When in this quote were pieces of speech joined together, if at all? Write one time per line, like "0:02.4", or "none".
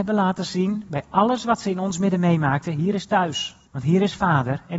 0:03.7